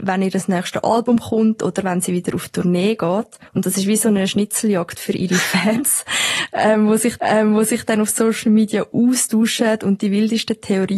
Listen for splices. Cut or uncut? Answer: cut